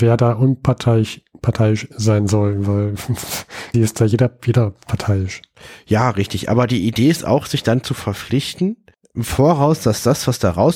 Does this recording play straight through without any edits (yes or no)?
no